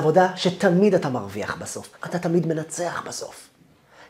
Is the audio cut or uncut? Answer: cut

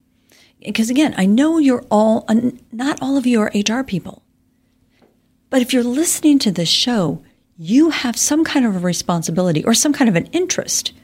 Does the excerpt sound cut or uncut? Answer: uncut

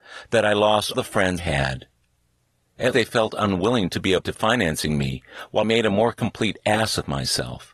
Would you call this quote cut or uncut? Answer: cut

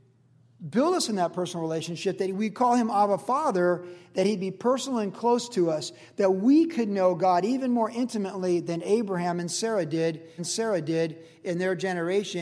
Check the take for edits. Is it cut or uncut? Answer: cut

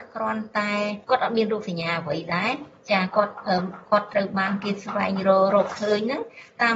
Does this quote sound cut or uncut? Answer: cut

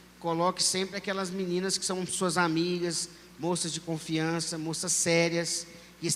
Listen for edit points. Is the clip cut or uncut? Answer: uncut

